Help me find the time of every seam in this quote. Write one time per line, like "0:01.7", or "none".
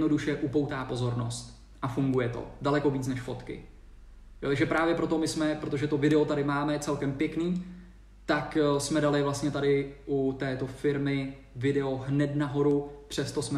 none